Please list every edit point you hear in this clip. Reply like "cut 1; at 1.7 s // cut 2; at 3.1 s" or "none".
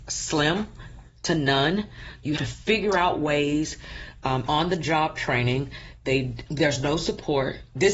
cut 1; at 2.4 s // cut 2; at 4.5 s // cut 3; at 6.5 s